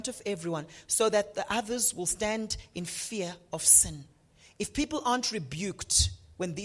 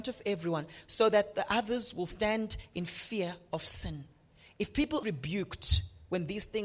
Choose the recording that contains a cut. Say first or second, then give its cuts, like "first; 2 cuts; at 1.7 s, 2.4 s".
second; 1 cut; at 5.0 s